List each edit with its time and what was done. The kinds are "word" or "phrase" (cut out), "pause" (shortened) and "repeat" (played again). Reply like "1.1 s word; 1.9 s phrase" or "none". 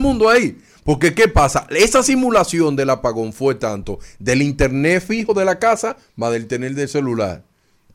none